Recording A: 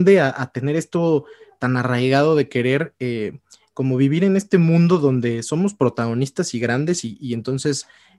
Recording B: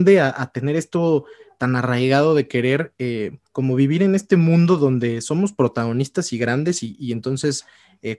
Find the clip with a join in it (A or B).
B